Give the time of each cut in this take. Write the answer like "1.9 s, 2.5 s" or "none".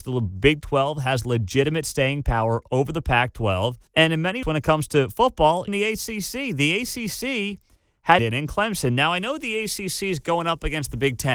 3.9 s, 4.4 s, 5.7 s, 8.2 s